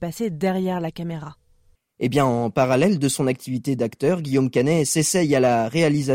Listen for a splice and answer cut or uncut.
uncut